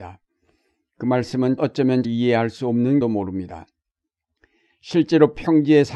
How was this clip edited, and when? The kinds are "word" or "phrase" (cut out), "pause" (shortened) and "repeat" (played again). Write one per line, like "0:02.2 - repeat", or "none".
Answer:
0:01.6 - word
0:02.0 - word
0:03.0 - word